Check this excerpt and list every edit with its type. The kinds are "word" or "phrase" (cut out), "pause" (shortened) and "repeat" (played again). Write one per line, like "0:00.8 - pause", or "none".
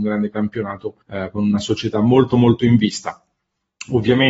0:01.0 - pause